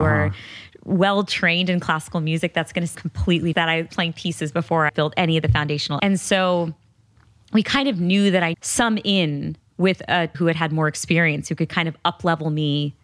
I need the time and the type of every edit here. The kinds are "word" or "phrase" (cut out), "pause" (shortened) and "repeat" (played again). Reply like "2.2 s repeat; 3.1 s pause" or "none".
2.9 s word; 3.5 s word; 3.9 s word; 4.9 s word; 6.0 s word; 8.5 s word; 10.3 s word

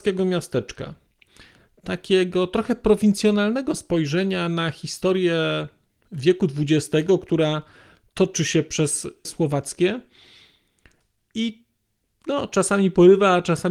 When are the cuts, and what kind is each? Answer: 9.2 s word

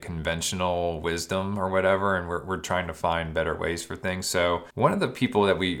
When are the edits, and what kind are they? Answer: 4.7 s pause

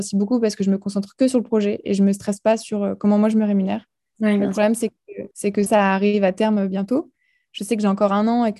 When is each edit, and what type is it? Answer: 5.3 s pause; 5.7 s word

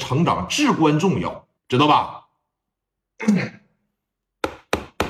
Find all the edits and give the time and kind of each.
1.6 s pause

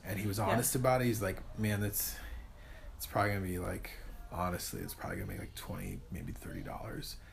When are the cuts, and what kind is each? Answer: none

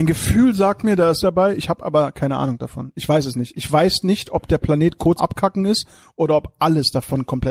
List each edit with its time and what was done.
1.2 s phrase; 5.2 s word

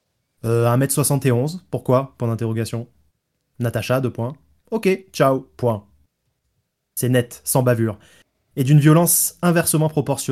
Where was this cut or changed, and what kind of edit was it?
none

